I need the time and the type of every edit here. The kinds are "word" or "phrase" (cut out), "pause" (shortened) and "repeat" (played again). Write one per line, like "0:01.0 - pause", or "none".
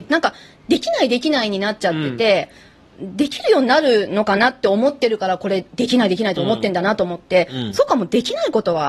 none